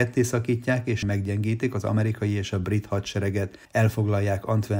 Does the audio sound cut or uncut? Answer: cut